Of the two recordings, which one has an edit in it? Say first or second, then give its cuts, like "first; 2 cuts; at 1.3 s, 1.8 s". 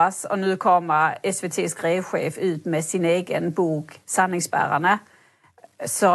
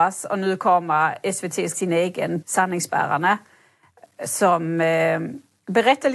second; 2 cuts; at 1.7 s, 2.4 s